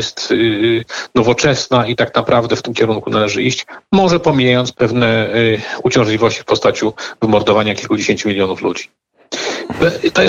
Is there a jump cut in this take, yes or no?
yes